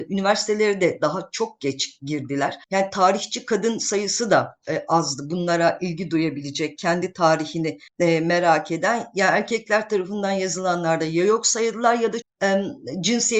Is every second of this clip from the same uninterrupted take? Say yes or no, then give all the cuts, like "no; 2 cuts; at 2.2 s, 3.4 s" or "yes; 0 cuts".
no; 3 cuts; at 2.6 s, 7.9 s, 12.2 s